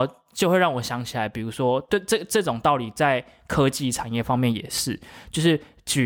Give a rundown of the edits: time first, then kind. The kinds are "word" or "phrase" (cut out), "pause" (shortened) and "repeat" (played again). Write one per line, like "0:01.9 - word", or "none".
none

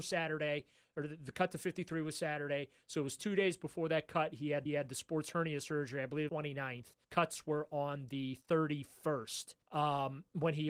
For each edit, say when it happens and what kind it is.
0:04.7 - repeat
0:06.3 - phrase
0:07.0 - pause
0:08.4 - pause
0:09.6 - pause

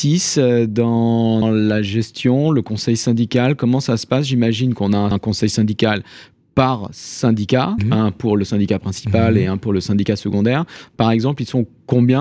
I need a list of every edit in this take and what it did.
0:01.4 - word
0:05.1 - word
0:07.8 - word

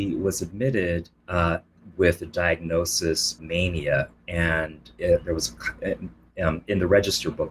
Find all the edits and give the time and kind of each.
0:03.4 - word

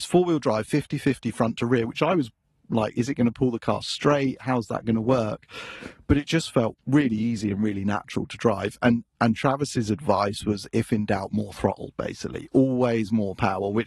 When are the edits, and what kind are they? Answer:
0:06.8 - pause

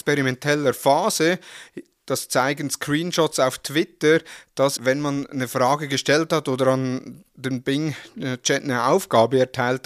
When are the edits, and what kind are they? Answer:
0:04.8 - word

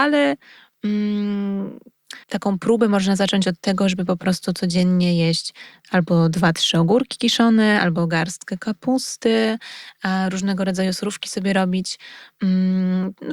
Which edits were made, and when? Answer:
0:02.2 - pause

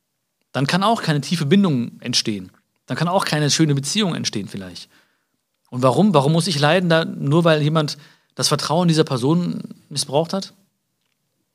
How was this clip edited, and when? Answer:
none

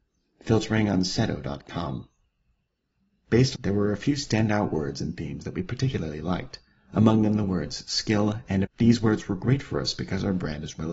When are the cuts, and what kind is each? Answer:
0:03.5 - phrase
0:08.6 - word

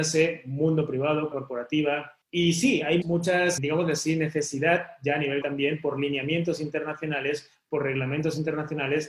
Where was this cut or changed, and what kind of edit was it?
0:01.3 - word
0:02.2 - pause
0:03.0 - word
0:03.6 - word
0:05.4 - word

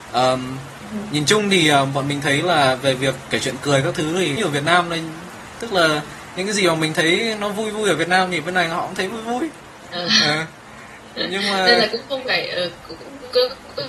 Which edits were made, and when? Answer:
0:04.4 - phrase

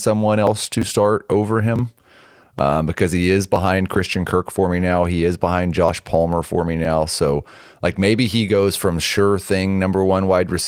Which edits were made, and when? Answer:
none

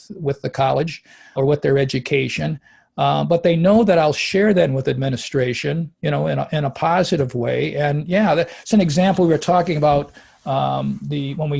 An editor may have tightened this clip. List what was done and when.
0:01.4 - word
0:04.7 - word
0:08.7 - word

